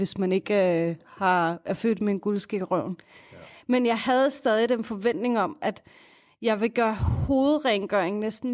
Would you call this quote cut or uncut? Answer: uncut